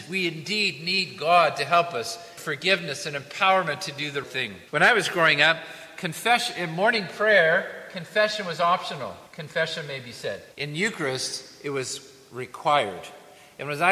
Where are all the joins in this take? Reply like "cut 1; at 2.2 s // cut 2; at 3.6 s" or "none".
cut 1; at 2.4 s // cut 2; at 4.2 s // cut 3; at 4.7 s // cut 4; at 9.3 s // cut 5; at 10.5 s